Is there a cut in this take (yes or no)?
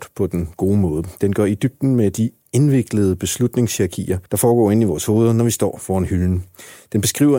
yes